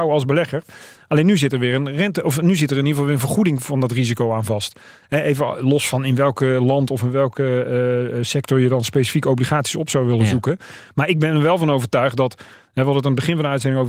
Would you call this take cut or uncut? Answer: uncut